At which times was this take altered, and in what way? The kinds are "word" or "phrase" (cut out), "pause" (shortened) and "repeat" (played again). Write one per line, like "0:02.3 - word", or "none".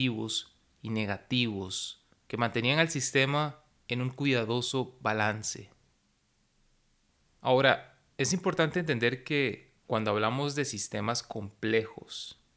0:02.1 - pause
0:08.1 - pause
0:09.8 - pause